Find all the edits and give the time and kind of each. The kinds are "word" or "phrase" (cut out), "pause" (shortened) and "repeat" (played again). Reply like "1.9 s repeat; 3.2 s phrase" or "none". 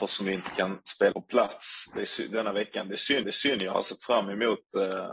1.1 s word; 3.2 s repeat